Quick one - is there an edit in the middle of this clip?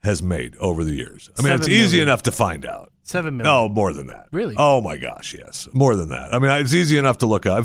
no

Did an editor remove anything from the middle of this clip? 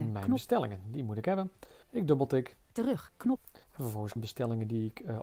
yes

